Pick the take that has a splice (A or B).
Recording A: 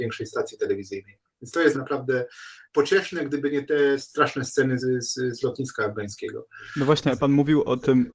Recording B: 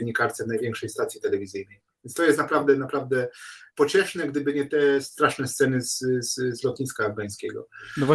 A